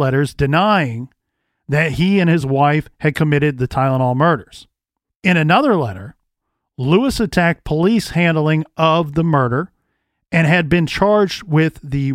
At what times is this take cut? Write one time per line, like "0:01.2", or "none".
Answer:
none